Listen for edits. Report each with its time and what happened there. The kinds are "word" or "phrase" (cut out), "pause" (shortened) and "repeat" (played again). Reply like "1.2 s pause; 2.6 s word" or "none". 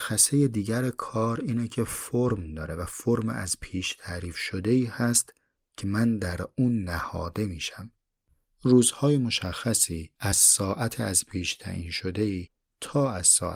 none